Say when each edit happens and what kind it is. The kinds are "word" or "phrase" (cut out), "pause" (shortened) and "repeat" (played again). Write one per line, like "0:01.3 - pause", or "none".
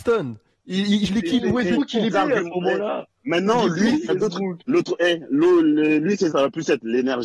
0:01.1 - word
0:02.1 - word
0:04.1 - word
0:04.6 - pause
0:06.3 - word